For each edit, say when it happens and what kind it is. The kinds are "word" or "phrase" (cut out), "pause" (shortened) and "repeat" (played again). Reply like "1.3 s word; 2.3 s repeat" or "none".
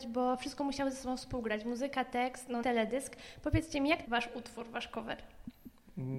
2.6 s word; 4.0 s word